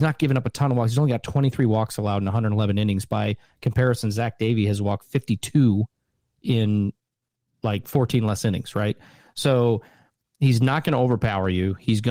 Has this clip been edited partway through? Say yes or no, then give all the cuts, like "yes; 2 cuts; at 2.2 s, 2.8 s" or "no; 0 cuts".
no; 0 cuts